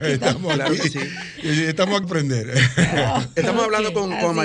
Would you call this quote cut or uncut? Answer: cut